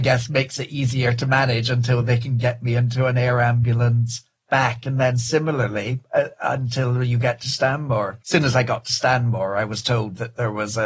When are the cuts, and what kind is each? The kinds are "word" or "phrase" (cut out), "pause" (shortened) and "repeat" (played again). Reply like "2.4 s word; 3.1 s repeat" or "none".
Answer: 8.2 s pause

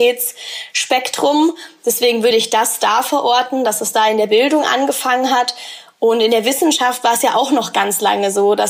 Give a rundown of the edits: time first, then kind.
none

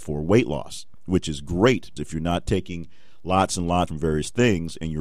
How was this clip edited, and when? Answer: 2.0 s word; 2.5 s word; 3.9 s phrase

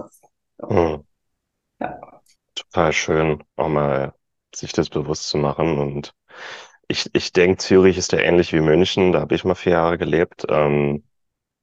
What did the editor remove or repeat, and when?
2.4 s pause; 3.5 s pause

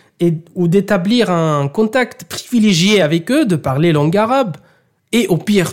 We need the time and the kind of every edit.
none

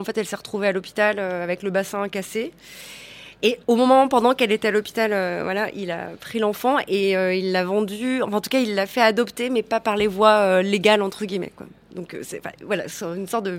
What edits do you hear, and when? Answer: 3.6 s pause

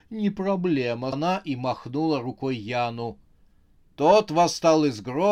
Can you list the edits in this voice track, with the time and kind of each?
1.1 s word

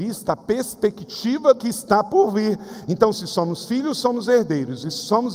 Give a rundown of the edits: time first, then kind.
1.5 s word

